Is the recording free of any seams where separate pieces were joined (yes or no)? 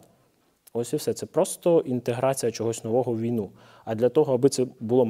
yes